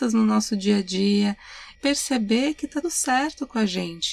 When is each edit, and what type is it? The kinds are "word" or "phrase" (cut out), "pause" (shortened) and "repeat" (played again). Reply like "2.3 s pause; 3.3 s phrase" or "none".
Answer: 1.8 s word; 2.8 s word